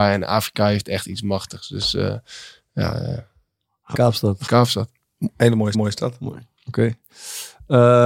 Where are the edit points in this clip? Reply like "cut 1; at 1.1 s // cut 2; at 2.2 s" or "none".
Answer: cut 1; at 3.9 s // cut 2; at 4.5 s // cut 3; at 5.7 s